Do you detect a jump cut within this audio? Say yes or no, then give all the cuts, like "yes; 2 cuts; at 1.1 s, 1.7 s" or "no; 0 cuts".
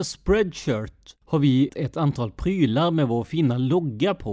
yes; 2 cuts; at 1.2 s, 1.7 s